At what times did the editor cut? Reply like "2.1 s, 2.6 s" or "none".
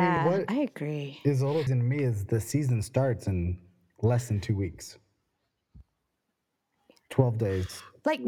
1.7 s